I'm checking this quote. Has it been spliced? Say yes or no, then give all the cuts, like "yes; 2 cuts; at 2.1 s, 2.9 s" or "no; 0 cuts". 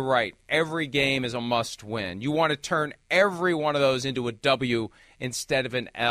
no; 0 cuts